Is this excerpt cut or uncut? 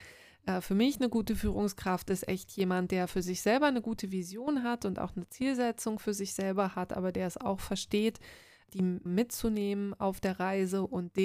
cut